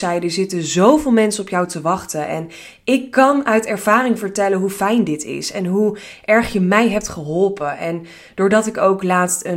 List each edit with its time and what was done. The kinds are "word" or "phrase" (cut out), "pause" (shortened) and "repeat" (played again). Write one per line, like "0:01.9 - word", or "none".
none